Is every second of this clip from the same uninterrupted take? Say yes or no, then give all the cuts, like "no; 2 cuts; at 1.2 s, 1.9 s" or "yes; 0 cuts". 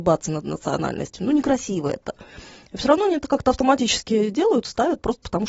yes; 0 cuts